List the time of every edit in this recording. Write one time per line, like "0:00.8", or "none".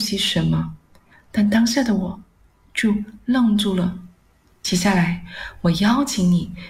none

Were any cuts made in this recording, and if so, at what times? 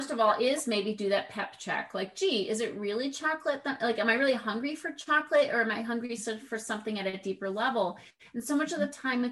none

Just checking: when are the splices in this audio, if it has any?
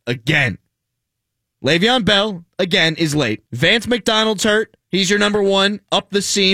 0:02.5
0:03.5
0:04.8

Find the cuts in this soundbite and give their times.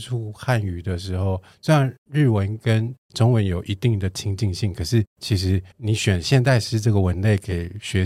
0:05.1
0:05.7

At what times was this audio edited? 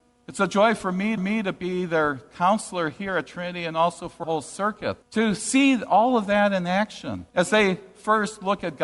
0:01.2
0:04.2
0:05.0
0:07.3

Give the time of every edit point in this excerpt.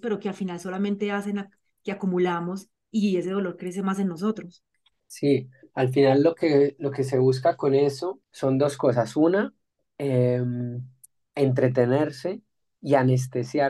0:08.2

